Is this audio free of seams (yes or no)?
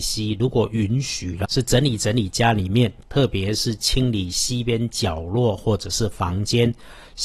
no